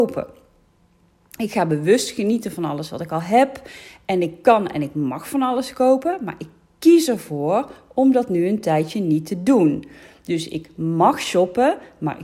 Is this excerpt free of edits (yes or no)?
yes